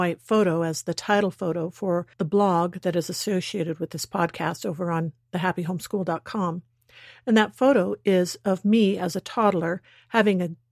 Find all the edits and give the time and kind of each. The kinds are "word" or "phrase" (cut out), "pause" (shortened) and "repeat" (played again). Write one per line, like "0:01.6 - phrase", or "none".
0:02.1 - pause